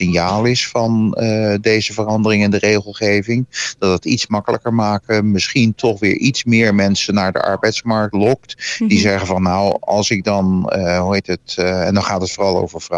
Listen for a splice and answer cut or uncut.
uncut